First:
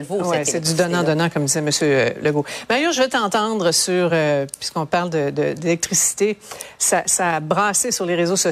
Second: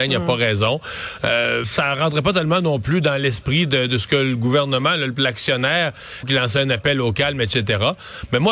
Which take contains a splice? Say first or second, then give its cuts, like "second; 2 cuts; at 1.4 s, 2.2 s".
second; 2 cuts; at 1.6 s, 6.2 s